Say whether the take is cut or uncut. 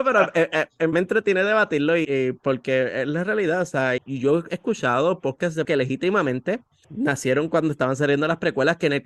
cut